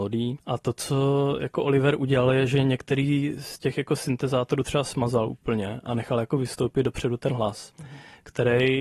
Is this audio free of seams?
yes; 0 cuts

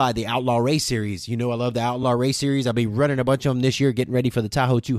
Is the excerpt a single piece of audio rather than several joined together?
yes; 0 cuts

